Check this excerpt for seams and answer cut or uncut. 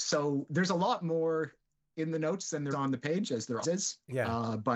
cut